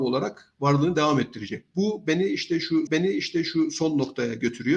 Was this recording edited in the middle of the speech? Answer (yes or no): yes